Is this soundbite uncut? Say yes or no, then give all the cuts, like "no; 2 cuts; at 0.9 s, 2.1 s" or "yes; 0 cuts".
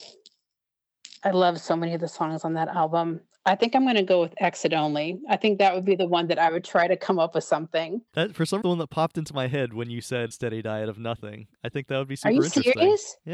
no; 3 cuts; at 8.1 s, 8.6 s, 10.3 s